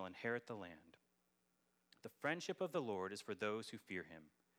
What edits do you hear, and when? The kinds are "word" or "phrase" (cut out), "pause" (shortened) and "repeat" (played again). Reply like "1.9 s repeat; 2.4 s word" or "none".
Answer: none